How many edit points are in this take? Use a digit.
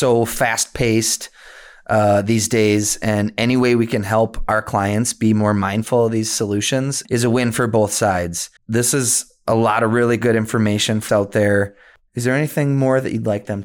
3